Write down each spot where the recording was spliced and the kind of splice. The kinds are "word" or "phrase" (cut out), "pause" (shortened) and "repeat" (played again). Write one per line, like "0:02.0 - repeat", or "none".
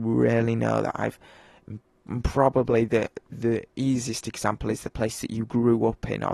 none